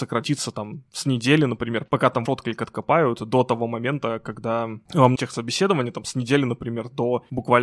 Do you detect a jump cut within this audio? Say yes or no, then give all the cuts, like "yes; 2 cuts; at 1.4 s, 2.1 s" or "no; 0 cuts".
yes; 2 cuts; at 2.3 s, 5.2 s